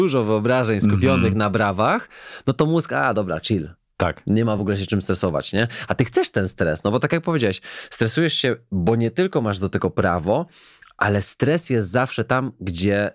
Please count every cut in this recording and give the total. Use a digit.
0